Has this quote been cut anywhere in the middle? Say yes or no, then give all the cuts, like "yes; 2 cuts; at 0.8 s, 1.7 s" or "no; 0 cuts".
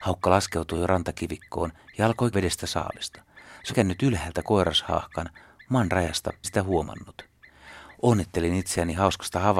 yes; 4 cuts; at 2.3 s, 3.7 s, 4.4 s, 6.4 s